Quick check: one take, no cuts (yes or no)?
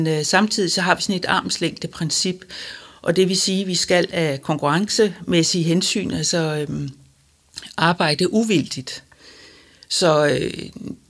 yes